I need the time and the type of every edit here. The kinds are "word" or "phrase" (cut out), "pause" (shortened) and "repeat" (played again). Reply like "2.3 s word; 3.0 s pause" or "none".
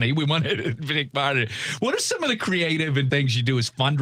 3.1 s word